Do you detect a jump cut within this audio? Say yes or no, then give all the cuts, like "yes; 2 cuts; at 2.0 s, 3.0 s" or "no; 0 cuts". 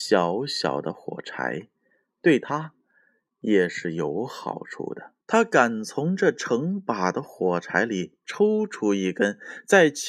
yes; 1 cut; at 5.2 s